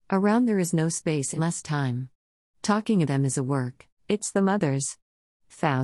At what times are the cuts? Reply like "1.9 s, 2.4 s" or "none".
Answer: 1.4 s, 3.0 s, 4.0 s